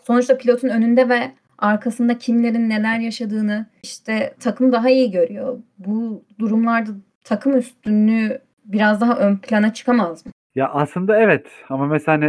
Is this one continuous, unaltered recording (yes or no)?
yes